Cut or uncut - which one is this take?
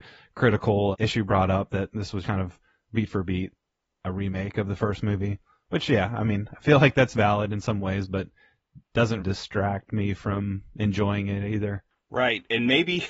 cut